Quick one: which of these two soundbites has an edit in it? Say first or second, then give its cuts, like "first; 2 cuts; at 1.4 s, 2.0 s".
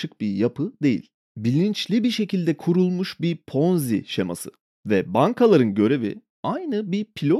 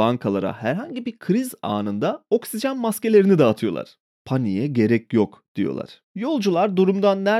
second; 1 cut; at 6.0 s